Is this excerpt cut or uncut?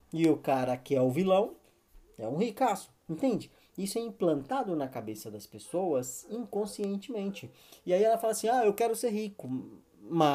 uncut